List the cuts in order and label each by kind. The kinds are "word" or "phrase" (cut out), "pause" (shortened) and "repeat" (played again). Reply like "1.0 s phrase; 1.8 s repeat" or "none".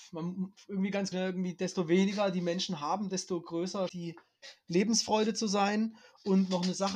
1.1 s word; 3.9 s word